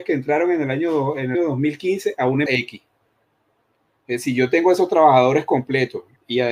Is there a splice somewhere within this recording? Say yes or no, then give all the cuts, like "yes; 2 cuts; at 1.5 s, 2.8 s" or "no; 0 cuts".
yes; 2 cuts; at 1.3 s, 2.5 s